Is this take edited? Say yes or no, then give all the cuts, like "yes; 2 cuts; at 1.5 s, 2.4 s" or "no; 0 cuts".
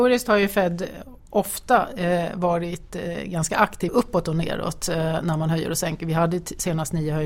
yes; 1 cut; at 3.9 s